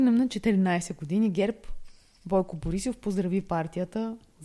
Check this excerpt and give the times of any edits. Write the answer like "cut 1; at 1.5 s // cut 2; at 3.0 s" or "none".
none